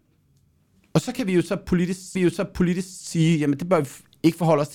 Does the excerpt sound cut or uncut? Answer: cut